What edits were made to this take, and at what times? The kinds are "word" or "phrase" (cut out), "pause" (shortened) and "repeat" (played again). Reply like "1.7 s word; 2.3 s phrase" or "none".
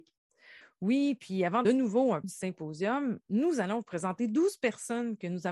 1.6 s phrase; 2.2 s word